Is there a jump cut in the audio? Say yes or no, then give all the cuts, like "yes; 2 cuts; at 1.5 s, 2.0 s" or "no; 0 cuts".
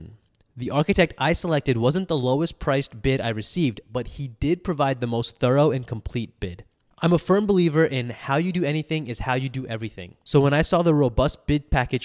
no; 0 cuts